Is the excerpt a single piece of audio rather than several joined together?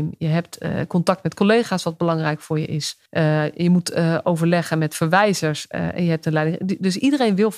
no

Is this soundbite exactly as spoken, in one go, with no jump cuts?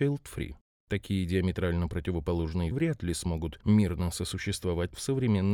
no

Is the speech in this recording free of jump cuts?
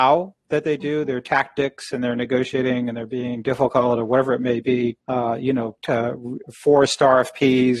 no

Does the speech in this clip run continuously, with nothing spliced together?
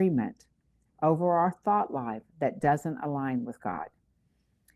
yes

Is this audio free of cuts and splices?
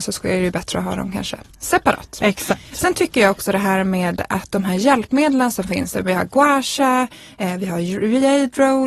yes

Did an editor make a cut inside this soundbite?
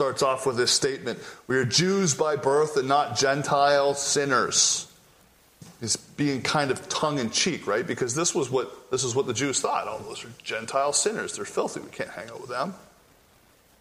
no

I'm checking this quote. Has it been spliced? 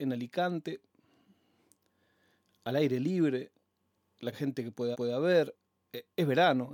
yes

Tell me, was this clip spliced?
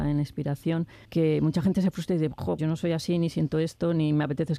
yes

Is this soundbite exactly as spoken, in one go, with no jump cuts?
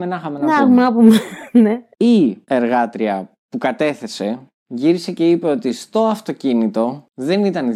yes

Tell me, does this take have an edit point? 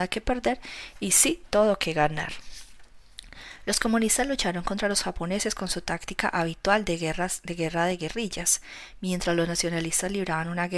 no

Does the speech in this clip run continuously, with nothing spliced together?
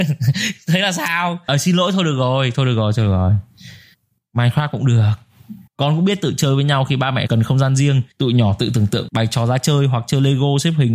no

